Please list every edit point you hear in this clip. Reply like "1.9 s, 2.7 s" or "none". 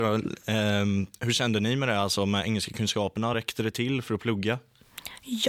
none